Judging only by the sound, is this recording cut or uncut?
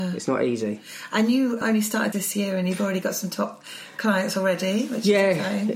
cut